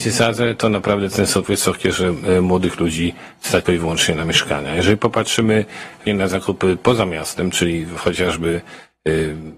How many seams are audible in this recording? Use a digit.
3